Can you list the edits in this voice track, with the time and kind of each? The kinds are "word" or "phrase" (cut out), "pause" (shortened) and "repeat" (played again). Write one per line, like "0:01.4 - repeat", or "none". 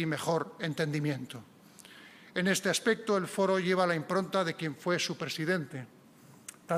none